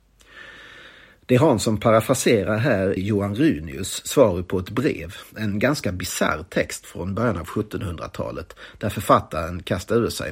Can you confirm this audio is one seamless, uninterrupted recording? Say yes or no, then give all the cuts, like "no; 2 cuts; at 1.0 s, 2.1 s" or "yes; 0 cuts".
no; 1 cut; at 3.0 s